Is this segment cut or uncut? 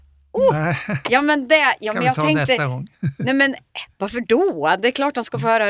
cut